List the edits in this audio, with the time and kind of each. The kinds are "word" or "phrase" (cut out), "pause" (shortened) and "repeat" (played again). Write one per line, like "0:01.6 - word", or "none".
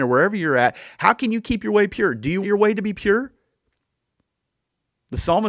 0:02.4 - word